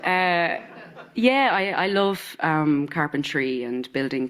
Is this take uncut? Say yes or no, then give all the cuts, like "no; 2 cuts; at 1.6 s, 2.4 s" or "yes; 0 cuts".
yes; 0 cuts